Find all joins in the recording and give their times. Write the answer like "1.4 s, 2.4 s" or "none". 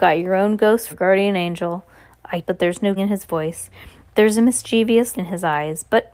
0.9 s, 2.4 s, 3.0 s, 5.1 s